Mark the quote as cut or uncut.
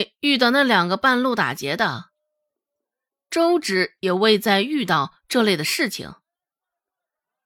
uncut